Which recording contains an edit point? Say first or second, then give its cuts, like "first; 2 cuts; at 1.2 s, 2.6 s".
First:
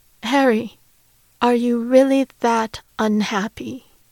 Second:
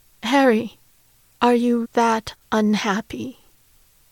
second; 1 cut; at 1.8 s